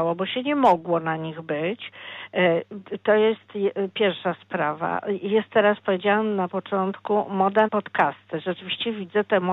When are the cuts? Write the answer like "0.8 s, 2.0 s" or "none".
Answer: 7.7 s